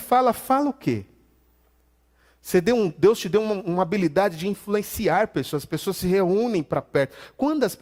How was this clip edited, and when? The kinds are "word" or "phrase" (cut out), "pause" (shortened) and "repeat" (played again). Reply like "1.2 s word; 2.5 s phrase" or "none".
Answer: none